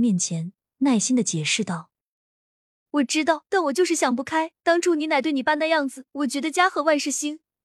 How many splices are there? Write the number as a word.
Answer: four